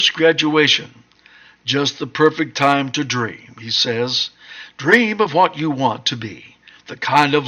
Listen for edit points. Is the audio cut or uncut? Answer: uncut